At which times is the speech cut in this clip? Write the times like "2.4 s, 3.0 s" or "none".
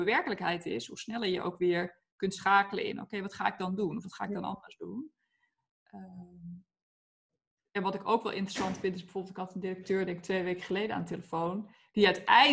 none